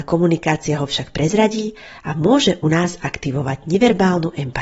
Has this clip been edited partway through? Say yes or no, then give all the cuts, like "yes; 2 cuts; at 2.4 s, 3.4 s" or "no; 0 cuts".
no; 0 cuts